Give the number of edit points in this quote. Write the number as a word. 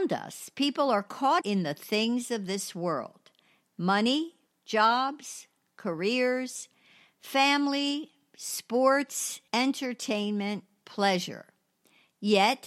three